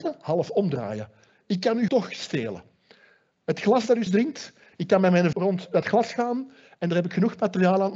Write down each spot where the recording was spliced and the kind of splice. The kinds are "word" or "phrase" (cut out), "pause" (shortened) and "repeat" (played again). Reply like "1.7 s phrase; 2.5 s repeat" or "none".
1.9 s word; 4.1 s word; 5.3 s word